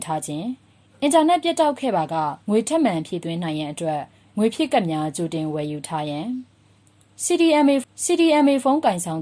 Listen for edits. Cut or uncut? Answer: cut